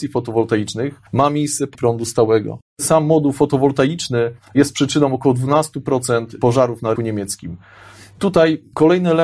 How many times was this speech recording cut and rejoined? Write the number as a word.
five